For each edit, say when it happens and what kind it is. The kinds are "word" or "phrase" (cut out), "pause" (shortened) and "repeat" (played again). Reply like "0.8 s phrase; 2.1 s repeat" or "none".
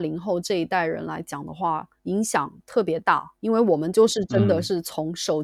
2.0 s pause; 3.4 s pause